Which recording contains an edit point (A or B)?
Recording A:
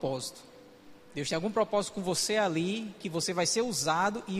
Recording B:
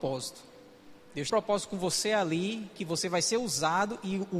B